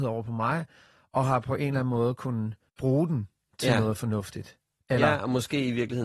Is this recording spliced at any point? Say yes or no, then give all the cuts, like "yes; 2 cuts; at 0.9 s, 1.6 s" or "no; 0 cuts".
no; 0 cuts